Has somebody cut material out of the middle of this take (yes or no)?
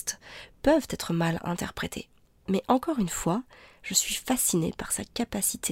no